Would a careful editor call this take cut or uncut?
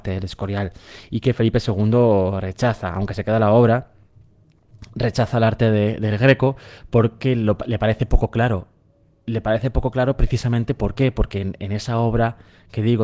uncut